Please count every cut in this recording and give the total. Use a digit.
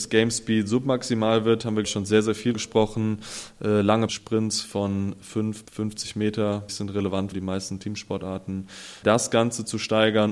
7